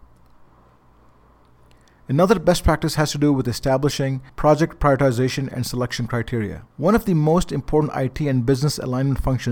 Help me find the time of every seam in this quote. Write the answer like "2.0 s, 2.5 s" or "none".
4.3 s, 6.7 s